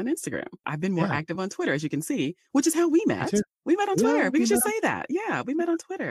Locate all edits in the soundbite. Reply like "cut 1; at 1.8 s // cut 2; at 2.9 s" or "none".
none